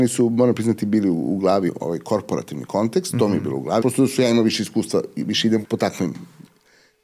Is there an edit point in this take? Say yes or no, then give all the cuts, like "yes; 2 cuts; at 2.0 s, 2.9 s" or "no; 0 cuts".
yes; 3 cuts; at 1.7 s, 3.8 s, 5.6 s